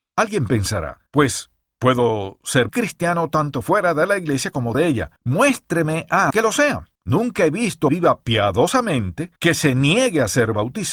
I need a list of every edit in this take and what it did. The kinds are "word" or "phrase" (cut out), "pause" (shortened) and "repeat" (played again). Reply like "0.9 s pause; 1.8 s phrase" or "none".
1.1 s pause; 2.7 s word; 4.7 s word; 5.2 s pause; 6.3 s word; 6.9 s pause; 7.9 s phrase; 9.4 s pause